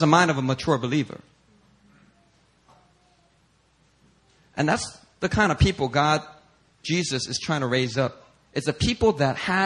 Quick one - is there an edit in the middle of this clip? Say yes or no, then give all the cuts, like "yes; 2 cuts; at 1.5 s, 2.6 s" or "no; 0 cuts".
no; 0 cuts